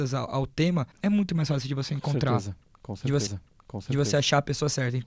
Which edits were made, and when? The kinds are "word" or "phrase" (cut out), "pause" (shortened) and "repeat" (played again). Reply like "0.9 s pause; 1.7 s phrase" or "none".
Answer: 0.9 s pause; 3.3 s repeat